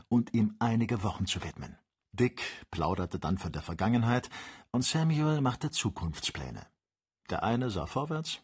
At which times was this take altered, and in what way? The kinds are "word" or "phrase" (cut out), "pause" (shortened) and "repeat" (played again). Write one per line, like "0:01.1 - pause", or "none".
0:02.0 - pause